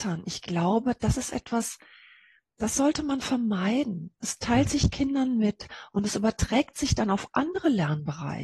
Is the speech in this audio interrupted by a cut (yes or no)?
no